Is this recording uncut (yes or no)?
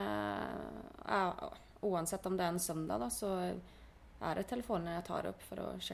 yes